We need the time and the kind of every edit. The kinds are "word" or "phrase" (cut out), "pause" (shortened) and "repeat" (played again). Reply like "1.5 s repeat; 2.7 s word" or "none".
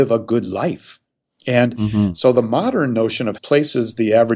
3.3 s word